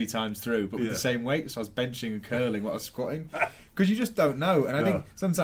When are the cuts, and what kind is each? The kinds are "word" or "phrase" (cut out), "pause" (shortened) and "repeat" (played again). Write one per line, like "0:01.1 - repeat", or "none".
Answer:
none